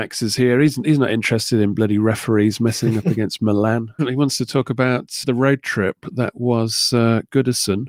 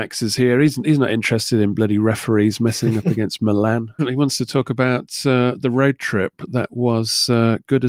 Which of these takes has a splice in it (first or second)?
first